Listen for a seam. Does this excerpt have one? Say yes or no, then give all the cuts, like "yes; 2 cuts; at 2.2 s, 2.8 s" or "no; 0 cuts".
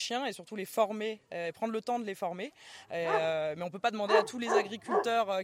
no; 0 cuts